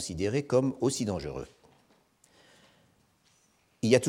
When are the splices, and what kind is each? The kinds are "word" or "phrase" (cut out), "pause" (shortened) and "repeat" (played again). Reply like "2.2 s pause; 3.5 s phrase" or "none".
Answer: none